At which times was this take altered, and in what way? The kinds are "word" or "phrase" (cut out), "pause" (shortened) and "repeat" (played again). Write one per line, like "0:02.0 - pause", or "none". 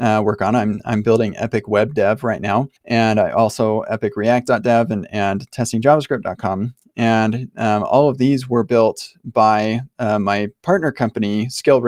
0:02.8 - pause